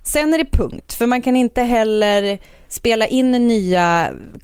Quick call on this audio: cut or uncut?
uncut